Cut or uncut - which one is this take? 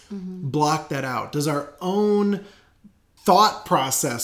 uncut